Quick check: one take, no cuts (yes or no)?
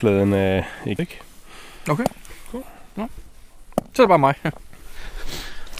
no